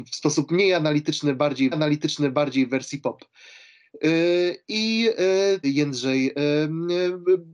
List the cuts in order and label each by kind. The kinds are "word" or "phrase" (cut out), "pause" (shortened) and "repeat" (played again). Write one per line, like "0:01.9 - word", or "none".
0:01.7 - repeat
0:05.6 - word